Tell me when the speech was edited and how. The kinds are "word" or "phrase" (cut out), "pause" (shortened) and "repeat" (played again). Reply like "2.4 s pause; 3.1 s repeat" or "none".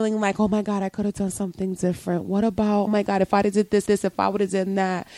2.9 s word; 3.9 s repeat